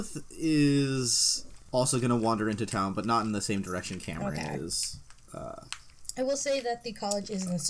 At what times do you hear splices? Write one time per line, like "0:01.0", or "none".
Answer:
none